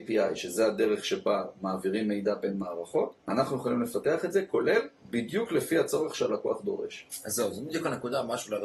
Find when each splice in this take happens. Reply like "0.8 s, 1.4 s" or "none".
3.2 s, 5.0 s